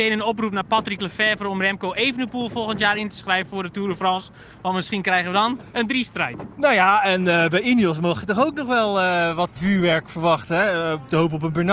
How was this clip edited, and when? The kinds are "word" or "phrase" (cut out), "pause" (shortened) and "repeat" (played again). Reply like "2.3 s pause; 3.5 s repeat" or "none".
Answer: 9.6 s word